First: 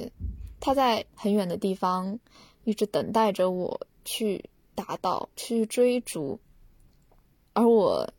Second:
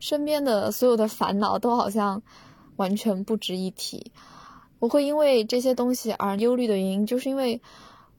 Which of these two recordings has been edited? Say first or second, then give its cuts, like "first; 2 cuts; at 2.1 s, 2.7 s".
first; 2 cuts; at 1.1 s, 5.3 s